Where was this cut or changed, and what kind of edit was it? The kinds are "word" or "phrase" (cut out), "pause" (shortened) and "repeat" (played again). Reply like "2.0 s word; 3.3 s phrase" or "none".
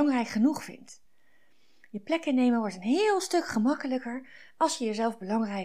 none